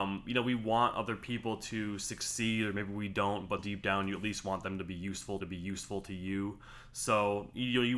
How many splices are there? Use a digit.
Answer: 2